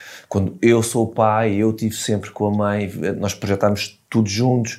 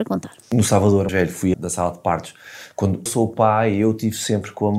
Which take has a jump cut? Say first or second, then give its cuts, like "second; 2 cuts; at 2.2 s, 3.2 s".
second; 3 cuts; at 1.1 s, 1.5 s, 3.1 s